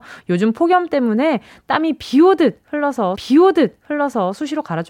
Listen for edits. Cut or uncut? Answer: cut